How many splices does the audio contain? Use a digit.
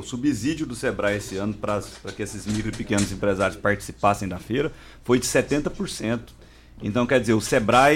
0